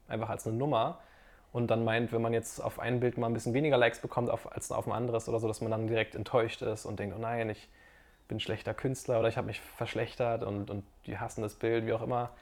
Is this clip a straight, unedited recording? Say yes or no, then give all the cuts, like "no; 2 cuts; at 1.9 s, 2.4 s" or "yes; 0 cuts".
yes; 0 cuts